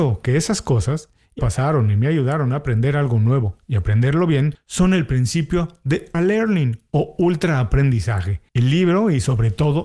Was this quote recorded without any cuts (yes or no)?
no